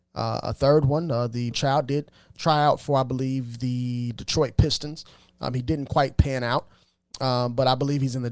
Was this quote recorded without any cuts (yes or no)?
no